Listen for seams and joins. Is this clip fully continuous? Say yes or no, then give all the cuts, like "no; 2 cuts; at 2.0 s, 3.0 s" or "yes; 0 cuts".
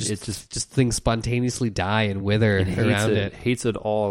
yes; 0 cuts